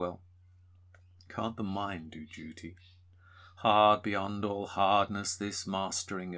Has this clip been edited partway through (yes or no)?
no